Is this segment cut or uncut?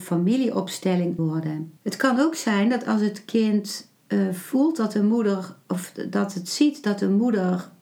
cut